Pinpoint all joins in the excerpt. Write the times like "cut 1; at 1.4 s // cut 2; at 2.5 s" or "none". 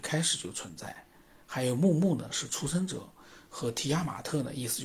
none